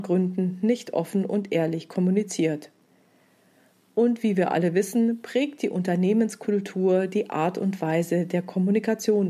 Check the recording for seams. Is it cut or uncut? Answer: uncut